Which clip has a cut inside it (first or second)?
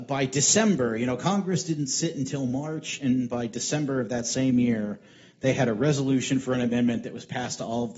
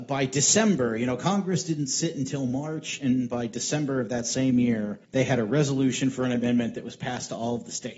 second